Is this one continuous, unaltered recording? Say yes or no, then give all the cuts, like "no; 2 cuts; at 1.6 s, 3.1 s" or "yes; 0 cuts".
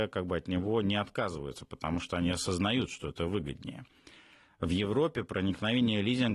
yes; 0 cuts